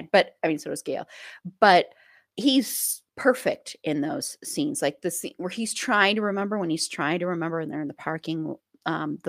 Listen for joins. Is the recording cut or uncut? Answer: cut